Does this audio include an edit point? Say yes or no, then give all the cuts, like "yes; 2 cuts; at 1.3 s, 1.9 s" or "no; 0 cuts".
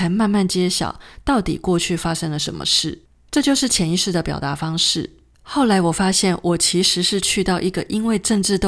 no; 0 cuts